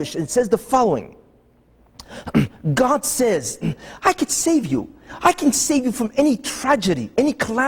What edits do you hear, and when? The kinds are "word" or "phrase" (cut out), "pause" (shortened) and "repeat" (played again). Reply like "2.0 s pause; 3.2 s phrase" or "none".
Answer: none